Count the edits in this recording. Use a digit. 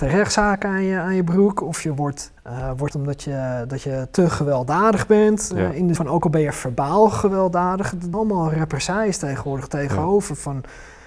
4